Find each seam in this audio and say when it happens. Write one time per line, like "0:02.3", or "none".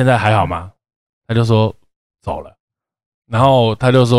none